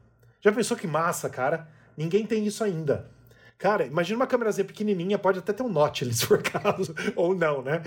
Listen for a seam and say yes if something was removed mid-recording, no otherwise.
no